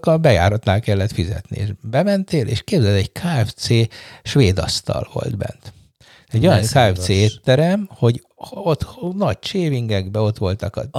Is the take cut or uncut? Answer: uncut